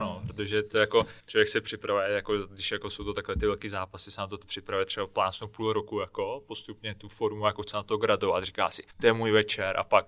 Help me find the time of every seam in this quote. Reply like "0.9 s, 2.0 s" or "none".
1.2 s, 8.9 s